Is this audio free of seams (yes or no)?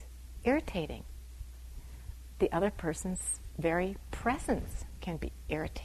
yes